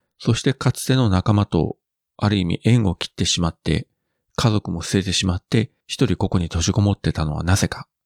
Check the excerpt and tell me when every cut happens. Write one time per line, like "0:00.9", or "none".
0:05.8